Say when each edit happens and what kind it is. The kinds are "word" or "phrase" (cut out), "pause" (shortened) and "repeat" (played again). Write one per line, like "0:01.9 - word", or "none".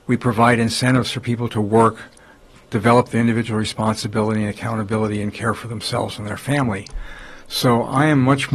none